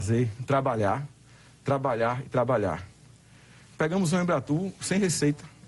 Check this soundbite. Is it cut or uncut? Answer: uncut